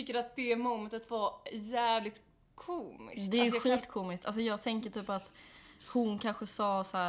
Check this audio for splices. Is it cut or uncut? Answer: uncut